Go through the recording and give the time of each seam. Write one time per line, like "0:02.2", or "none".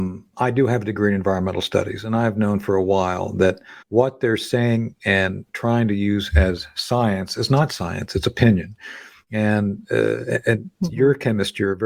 0:03.8